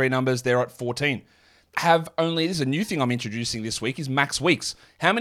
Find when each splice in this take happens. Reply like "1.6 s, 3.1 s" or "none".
1.7 s